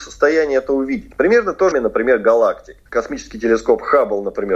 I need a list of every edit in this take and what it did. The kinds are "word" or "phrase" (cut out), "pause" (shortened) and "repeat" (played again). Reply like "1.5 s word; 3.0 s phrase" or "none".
1.7 s phrase; 2.9 s pause